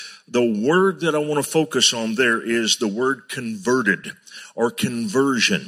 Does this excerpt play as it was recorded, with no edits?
yes; 0 cuts

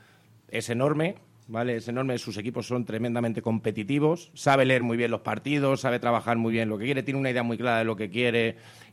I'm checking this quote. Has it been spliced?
no; 0 cuts

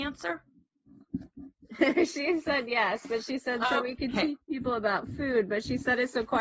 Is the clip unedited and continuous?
yes; 0 cuts

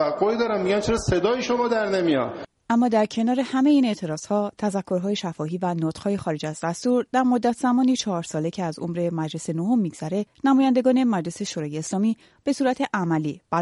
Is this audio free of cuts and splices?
yes; 0 cuts

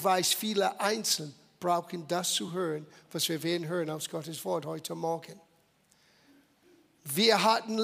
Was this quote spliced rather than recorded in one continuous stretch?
no; 0 cuts

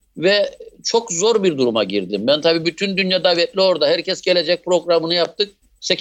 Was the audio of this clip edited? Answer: no; 0 cuts

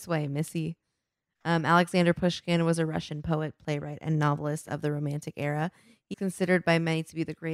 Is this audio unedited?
no; 1 cut; at 6.1 s

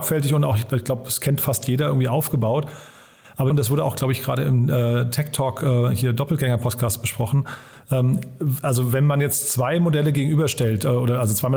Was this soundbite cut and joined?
yes; 1 cut; at 3.5 s

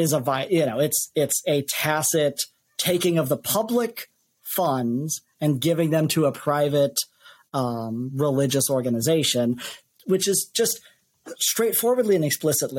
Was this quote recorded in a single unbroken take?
yes; 0 cuts

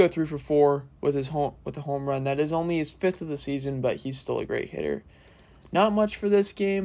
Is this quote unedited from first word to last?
yes; 0 cuts

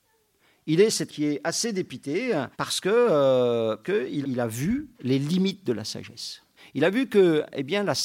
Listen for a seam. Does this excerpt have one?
yes; 6 cuts; at 1.1 s, 2.5 s, 3.8 s, 4.2 s, 4.9 s, 6.6 s

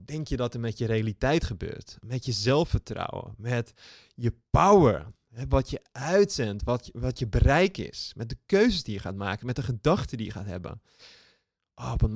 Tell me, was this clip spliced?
no; 0 cuts

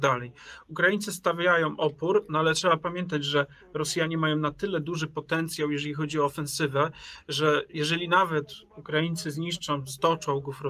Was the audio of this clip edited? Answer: no; 0 cuts

